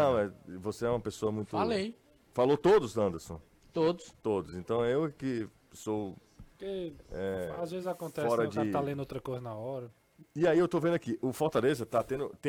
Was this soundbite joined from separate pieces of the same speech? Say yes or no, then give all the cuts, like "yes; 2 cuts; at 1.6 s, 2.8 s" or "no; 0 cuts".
no; 0 cuts